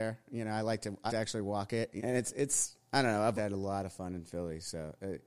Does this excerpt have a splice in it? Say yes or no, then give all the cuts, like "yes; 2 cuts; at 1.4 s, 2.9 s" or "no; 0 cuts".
yes; 3 cuts; at 1.1 s, 2.0 s, 3.4 s